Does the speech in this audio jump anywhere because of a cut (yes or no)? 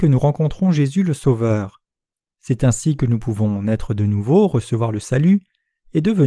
no